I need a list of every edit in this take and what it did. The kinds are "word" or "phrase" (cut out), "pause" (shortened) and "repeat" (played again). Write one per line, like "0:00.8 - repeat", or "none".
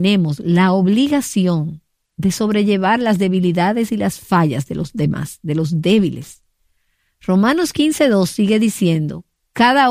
none